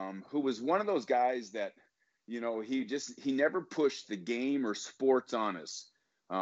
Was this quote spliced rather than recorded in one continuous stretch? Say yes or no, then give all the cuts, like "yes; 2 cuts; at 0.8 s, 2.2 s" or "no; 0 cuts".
no; 0 cuts